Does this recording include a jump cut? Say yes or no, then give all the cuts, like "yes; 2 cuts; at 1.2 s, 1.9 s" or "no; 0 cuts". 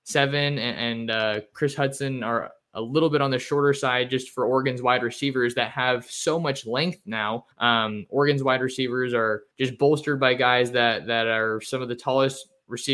yes; 2 cuts; at 7.5 s, 9.5 s